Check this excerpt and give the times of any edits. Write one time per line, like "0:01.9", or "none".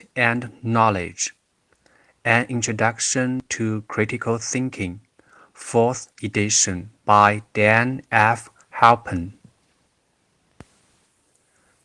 0:07.0